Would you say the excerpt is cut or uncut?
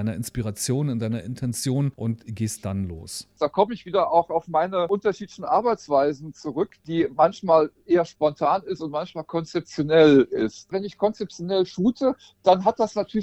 cut